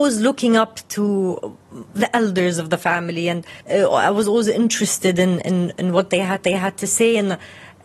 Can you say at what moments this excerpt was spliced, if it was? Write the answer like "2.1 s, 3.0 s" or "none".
3.6 s, 6.4 s